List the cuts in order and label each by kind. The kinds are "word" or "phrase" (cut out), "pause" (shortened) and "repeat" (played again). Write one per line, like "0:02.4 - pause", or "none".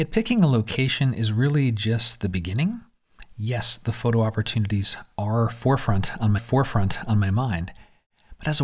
0:06.4 - repeat